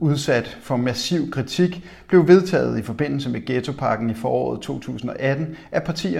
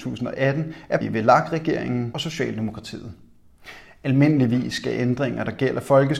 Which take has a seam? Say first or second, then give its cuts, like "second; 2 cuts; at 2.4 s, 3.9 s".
second; 2 cuts; at 1.0 s, 2.1 s